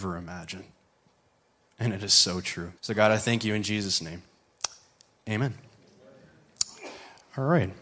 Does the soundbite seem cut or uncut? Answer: cut